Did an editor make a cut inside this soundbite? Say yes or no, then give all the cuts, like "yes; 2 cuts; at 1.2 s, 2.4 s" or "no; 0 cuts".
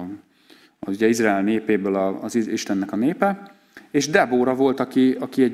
no; 0 cuts